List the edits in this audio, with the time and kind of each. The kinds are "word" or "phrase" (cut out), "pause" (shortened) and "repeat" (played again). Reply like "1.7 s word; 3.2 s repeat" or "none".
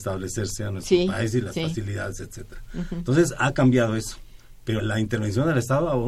4.8 s word

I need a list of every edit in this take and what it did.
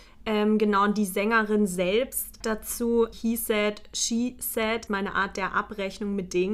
2.4 s word; 3.1 s word; 4.9 s word

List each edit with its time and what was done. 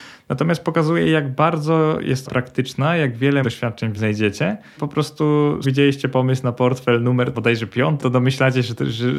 2.3 s word; 3.4 s word; 4.0 s word; 4.8 s word; 5.6 s word; 7.3 s word; 8.0 s word

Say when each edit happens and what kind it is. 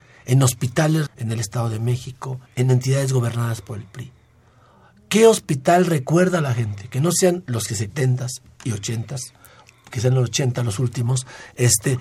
1.1 s word; 2.5 s pause; 7.9 s phrase

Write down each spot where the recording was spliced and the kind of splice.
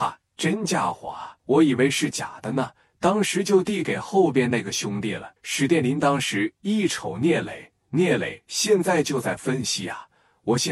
1.4 s pause; 5.4 s pause

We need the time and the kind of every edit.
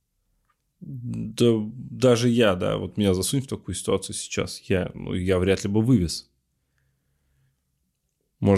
none

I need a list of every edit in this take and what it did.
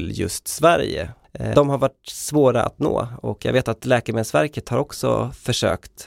1.5 s word

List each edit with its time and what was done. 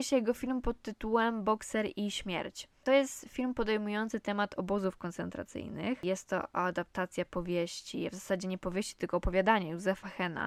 none

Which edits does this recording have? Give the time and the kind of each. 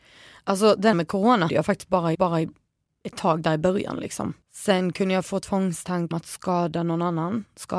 0.9 s word; 1.5 s word; 2.1 s repeat; 4.4 s pause; 6.1 s word

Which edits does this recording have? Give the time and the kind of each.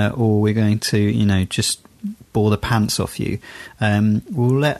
none

